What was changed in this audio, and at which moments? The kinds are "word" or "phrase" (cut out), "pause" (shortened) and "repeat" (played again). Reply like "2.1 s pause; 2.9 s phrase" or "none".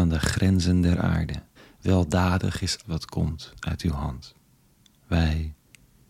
1.6 s pause; 2.8 s word; 4.8 s pause